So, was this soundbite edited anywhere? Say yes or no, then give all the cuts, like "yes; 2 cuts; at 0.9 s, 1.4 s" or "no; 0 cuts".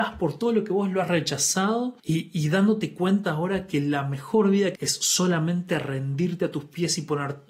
yes; 2 cuts; at 2.0 s, 4.7 s